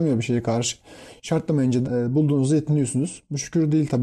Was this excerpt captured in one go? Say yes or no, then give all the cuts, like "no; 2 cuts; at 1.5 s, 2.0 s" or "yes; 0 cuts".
no; 1 cut; at 1.8 s